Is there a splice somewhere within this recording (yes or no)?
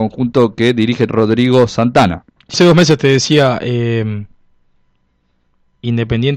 yes